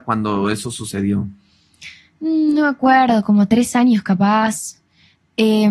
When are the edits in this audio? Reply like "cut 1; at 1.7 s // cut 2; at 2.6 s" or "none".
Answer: none